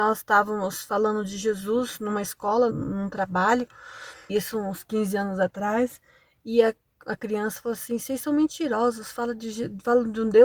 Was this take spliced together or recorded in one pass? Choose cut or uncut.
cut